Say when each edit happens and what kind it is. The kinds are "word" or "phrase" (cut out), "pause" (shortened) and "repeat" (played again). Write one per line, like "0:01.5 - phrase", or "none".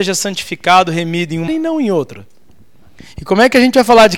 0:01.5 - word